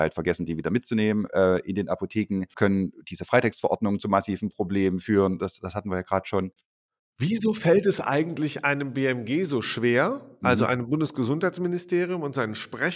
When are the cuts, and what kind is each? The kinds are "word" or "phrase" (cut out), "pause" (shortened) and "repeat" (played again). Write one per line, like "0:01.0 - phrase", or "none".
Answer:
0:02.5 - word